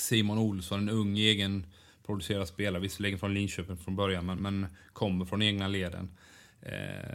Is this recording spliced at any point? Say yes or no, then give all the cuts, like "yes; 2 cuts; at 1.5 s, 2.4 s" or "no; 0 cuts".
no; 0 cuts